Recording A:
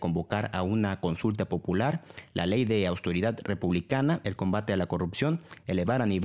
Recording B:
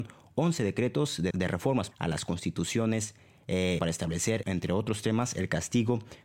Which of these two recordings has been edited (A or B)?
B